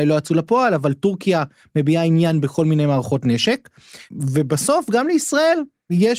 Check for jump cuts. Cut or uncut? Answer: uncut